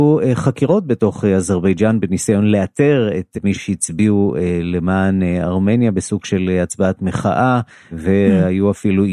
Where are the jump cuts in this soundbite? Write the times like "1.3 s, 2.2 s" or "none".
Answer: 7.7 s